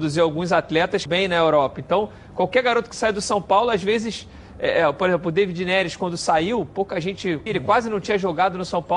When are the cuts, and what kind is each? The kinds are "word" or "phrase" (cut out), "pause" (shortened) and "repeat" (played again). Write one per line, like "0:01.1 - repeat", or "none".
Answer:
0:01.1 - phrase
0:07.5 - word

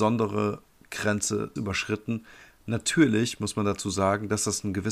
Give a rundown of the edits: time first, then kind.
0:01.6 - word

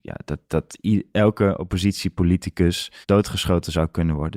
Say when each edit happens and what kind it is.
0:03.0 - pause

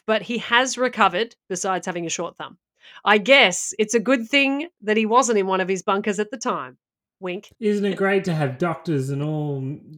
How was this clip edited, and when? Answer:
0:07.5 - pause

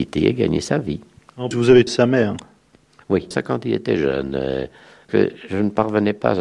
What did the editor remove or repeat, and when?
0:01.5 - word
0:01.9 - word
0:03.3 - word
0:05.1 - word

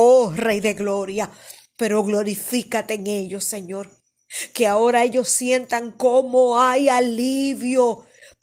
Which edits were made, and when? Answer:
none

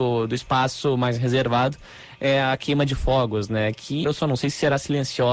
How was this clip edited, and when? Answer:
0:04.0 - word

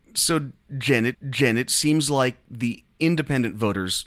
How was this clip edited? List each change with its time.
0:01.1 - repeat

